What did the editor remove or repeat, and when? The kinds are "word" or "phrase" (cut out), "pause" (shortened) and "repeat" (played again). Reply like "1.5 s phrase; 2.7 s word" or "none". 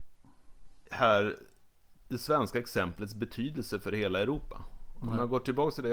none